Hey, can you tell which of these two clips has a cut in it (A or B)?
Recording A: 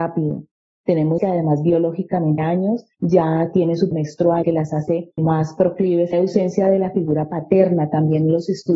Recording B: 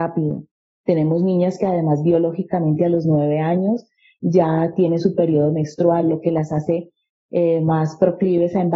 A